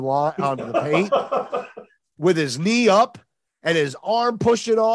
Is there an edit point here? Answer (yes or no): no